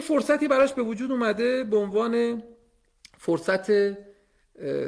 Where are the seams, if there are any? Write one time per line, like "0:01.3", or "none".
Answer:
none